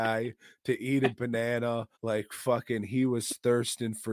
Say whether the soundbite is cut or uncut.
cut